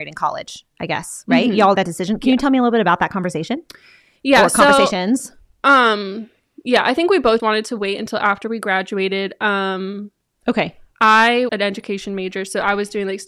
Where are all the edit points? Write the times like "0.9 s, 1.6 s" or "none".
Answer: 1.7 s, 7.4 s, 11.5 s